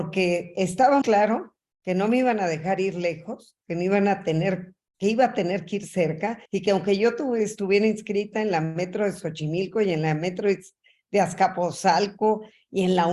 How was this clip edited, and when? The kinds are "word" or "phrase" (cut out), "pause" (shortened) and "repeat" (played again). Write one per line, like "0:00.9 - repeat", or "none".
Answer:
0:01.0 - word
0:06.5 - pause